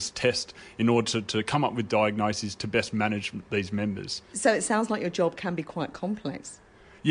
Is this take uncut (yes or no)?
yes